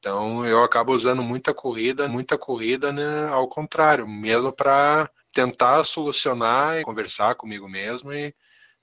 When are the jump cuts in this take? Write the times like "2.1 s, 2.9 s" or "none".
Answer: 2.1 s, 5.2 s, 6.8 s